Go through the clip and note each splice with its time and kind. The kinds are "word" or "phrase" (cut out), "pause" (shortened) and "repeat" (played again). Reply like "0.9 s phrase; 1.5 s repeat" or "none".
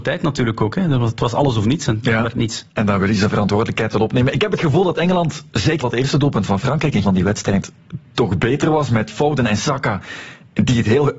5.8 s word; 7.0 s phrase